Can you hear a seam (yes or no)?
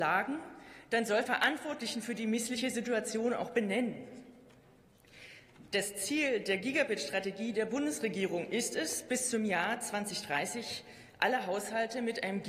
yes